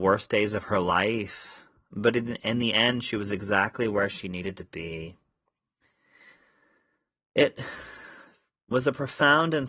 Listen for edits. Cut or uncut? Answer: uncut